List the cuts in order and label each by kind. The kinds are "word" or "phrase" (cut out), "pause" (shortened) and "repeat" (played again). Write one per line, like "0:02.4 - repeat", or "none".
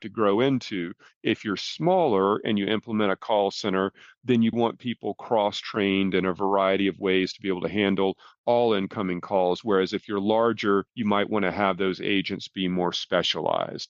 0:04.5 - word
0:10.9 - pause